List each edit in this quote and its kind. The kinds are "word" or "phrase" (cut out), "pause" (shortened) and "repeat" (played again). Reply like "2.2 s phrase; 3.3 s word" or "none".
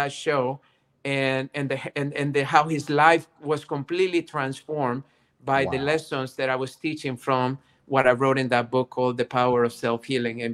none